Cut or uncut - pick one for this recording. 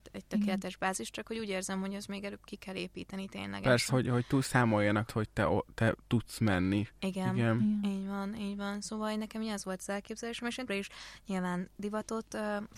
cut